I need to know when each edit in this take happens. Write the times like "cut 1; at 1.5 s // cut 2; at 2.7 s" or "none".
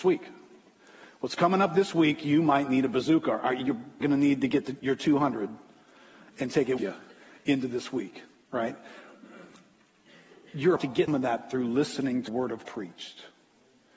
cut 1; at 4.0 s // cut 2; at 6.8 s // cut 3; at 10.8 s // cut 4; at 11.1 s // cut 5; at 12.3 s // cut 6; at 12.6 s